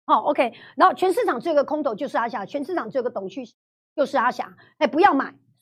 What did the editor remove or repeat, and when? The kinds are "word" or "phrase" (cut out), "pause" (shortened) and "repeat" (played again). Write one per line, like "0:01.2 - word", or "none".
none